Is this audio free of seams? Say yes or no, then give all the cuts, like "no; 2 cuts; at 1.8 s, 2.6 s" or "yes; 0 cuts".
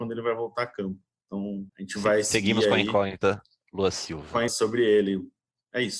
no; 2 cuts; at 1.7 s, 4.5 s